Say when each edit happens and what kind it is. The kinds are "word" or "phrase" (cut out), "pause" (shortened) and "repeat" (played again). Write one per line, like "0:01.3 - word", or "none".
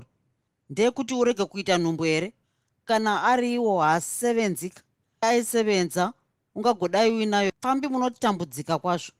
0:05.2 - word
0:07.5 - word

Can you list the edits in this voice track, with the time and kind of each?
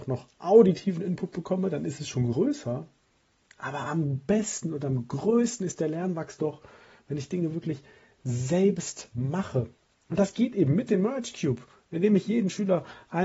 none

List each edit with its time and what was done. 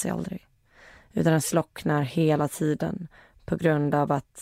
none

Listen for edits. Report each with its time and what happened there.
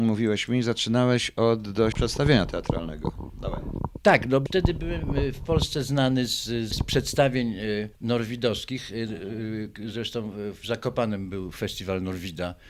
0:01.9 - word
0:04.5 - word
0:06.7 - word
0:07.9 - pause

